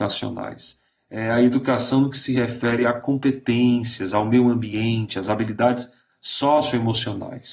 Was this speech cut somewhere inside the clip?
no; 0 cuts

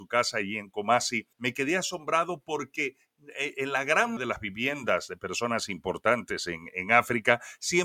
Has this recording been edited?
yes; 2 cuts; at 1.3 s, 4.2 s

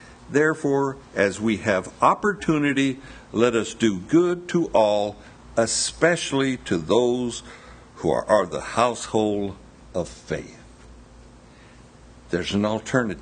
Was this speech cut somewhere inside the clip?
no; 0 cuts

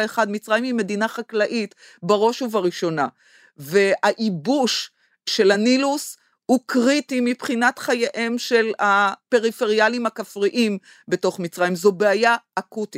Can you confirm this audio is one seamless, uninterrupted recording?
yes; 0 cuts

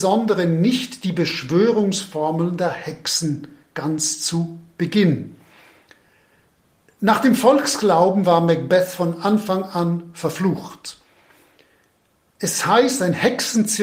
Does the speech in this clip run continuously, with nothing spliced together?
yes; 0 cuts

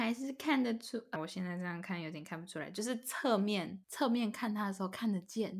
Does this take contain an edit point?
yes; 2 cuts; at 1.2 s, 3.8 s

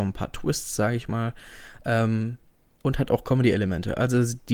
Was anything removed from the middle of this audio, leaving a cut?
no; 0 cuts

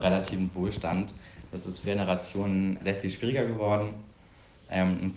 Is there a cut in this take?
yes; 2 cuts; at 1.8 s, 2.8 s

